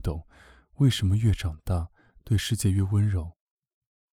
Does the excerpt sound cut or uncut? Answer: uncut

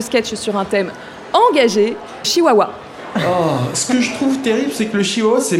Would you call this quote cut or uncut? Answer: cut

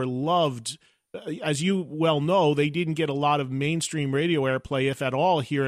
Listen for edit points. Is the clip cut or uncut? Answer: uncut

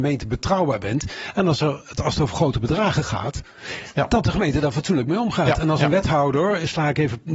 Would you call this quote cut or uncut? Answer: uncut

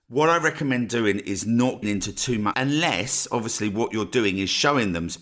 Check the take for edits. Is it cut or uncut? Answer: cut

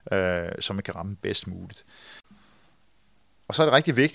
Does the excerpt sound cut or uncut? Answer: uncut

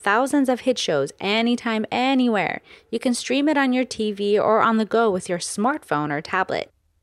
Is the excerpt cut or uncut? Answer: uncut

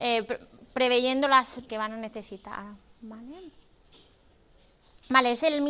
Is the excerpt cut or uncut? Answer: cut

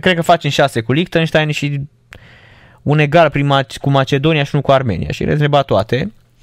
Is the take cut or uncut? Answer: uncut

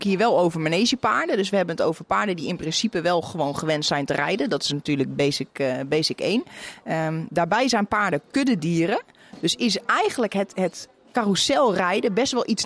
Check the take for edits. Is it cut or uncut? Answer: uncut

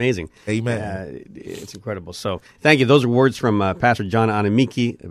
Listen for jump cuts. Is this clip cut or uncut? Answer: uncut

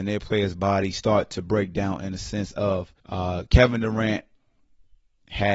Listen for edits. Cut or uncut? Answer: cut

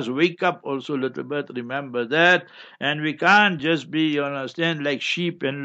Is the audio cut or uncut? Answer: uncut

